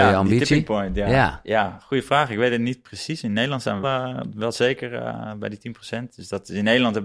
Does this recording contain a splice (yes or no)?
yes